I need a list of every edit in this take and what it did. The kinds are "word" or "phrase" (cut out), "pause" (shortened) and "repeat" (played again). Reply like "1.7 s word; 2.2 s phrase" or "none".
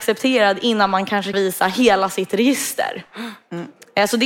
1.3 s word